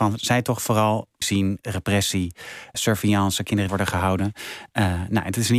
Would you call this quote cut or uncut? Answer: cut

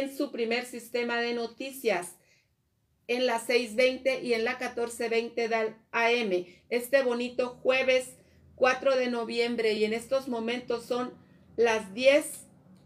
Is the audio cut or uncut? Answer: uncut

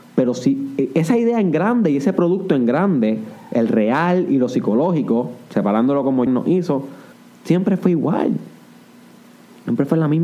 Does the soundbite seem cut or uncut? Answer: cut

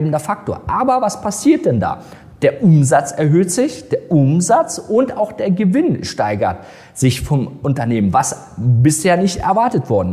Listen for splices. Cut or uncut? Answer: uncut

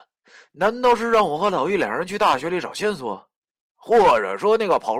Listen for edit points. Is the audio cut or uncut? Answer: uncut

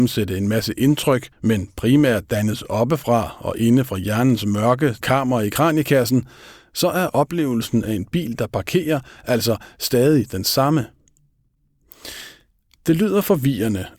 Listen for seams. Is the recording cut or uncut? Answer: cut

